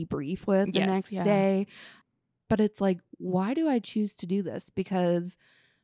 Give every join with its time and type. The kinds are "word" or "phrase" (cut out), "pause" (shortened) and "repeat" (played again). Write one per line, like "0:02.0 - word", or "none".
none